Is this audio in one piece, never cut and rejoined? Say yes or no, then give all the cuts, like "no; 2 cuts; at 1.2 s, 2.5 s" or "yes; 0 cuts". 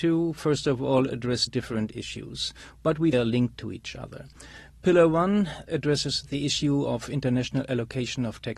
no; 3 cuts; at 1.5 s, 3.1 s, 5.7 s